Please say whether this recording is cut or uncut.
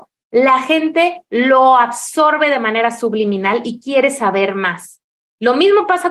uncut